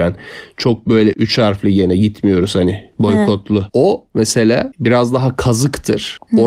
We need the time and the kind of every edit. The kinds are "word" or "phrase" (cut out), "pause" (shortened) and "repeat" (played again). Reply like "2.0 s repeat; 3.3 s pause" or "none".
1.1 s word; 4.7 s word